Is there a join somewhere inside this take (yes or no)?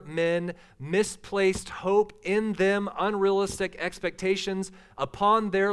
no